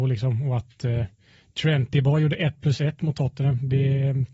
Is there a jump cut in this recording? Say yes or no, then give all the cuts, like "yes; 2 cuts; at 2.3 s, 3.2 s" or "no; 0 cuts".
no; 0 cuts